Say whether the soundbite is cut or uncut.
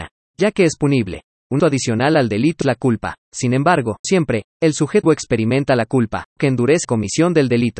cut